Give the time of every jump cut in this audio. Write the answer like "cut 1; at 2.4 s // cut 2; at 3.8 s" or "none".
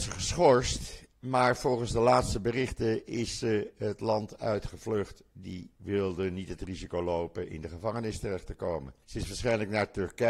cut 1; at 5.7 s // cut 2; at 9.0 s